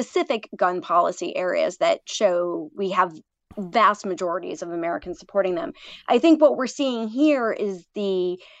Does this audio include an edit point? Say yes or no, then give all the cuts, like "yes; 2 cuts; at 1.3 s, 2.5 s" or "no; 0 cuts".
no; 0 cuts